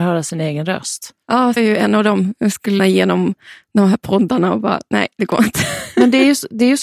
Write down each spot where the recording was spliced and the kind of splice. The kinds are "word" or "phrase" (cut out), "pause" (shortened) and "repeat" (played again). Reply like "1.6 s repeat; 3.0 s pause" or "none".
1.6 s word; 2.8 s word